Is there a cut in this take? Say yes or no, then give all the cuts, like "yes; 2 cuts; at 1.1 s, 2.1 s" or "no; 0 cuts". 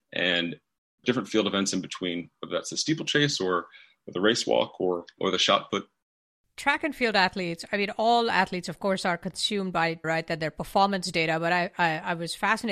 yes; 3 cuts; at 1.0 s, 5.2 s, 10.0 s